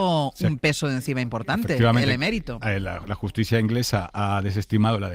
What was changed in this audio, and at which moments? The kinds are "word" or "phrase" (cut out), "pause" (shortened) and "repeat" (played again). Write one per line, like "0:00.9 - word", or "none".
none